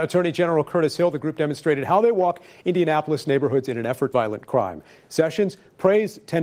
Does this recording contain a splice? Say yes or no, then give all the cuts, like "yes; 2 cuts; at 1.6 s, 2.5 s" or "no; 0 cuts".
yes; 1 cut; at 4.1 s